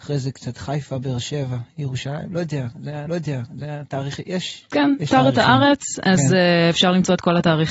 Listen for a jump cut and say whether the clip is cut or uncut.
cut